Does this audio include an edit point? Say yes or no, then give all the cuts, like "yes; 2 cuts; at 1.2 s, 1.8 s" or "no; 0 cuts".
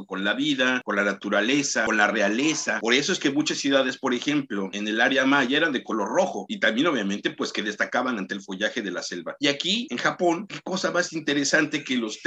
no; 0 cuts